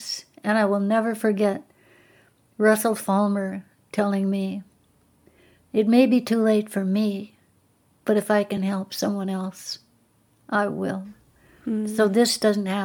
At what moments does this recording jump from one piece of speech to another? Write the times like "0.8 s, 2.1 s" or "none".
none